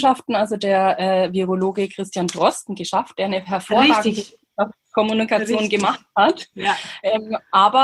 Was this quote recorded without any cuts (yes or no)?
yes